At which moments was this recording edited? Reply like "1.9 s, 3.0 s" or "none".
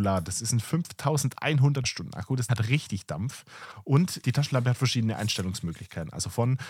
1.8 s, 2.5 s, 4.2 s